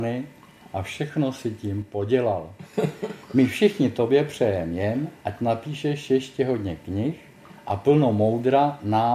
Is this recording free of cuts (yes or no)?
yes